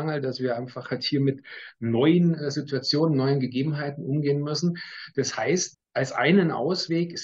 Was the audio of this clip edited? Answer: yes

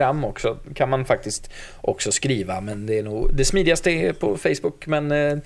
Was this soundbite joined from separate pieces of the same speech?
no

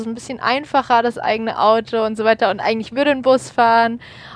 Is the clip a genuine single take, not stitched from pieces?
yes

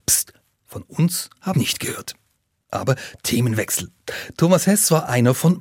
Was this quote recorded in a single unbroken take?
no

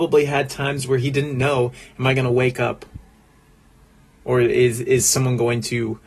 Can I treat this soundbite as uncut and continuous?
yes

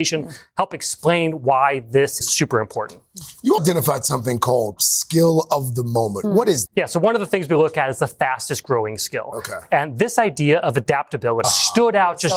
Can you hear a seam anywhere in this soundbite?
yes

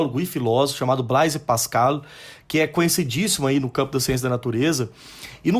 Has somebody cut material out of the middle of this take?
no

